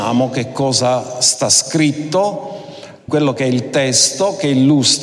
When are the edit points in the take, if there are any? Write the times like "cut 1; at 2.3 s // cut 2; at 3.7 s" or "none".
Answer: cut 1; at 3.1 s